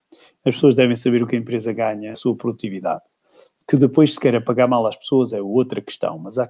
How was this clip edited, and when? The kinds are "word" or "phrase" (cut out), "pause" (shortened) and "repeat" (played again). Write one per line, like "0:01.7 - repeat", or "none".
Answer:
0:02.1 - phrase